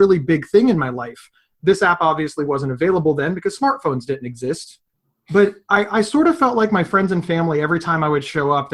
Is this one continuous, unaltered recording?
yes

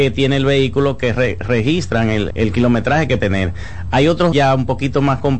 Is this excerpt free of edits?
no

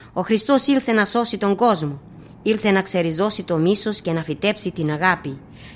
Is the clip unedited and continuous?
yes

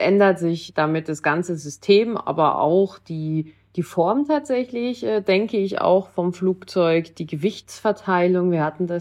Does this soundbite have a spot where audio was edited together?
no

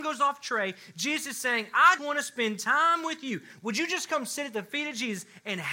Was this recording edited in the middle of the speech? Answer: yes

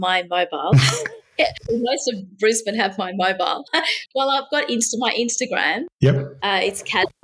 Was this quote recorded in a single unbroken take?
no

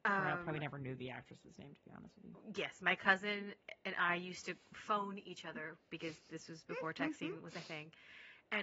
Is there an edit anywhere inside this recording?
no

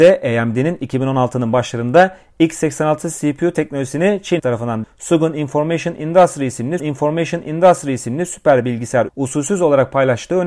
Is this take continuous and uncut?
no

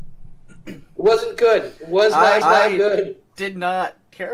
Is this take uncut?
no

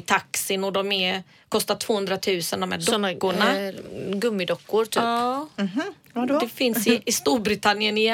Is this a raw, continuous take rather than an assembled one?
yes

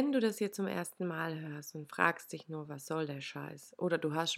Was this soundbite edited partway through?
no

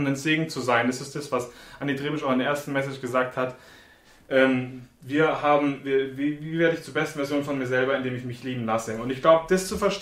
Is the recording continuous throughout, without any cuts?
yes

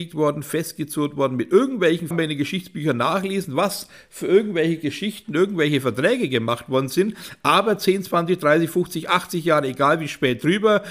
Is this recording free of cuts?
no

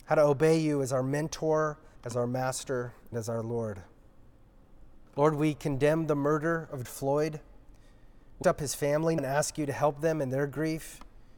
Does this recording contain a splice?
yes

